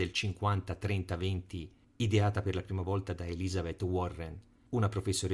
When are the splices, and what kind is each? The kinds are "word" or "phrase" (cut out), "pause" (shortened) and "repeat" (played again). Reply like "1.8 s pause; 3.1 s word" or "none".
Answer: none

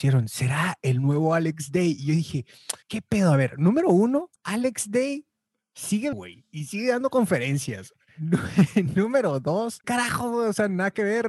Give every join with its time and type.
2.8 s pause; 4.4 s pause; 6.1 s word; 9.8 s word

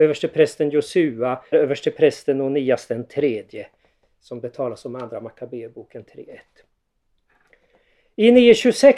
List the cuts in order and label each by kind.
1.5 s word

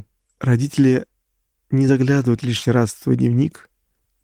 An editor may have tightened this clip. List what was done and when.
none

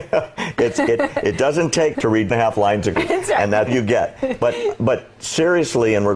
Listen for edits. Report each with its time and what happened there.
1.9 s word; 2.3 s phrase; 2.9 s word; 3.7 s word

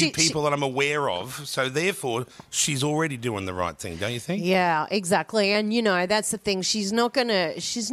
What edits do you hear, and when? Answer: none

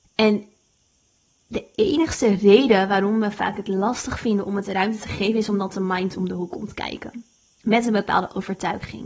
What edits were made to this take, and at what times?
none

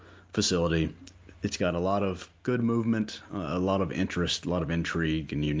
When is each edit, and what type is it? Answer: none

